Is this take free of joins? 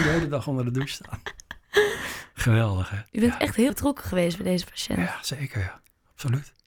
no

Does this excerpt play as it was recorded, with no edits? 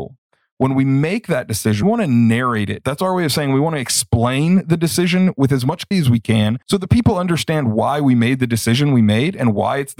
no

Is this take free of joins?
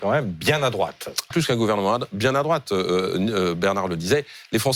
no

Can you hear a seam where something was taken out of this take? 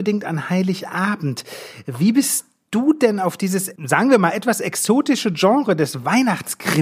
yes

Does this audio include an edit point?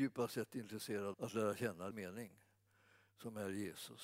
yes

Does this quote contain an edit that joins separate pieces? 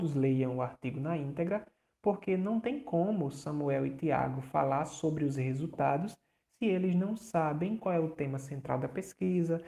no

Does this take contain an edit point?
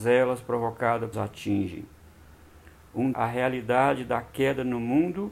yes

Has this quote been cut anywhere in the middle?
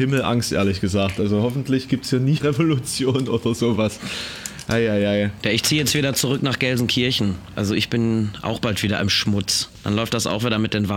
yes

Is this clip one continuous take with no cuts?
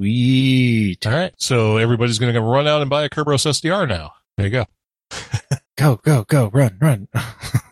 no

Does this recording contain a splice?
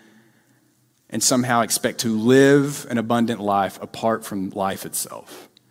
no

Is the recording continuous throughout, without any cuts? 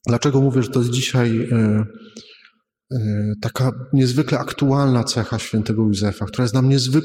yes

